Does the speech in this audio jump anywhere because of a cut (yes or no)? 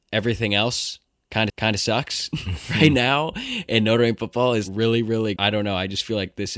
yes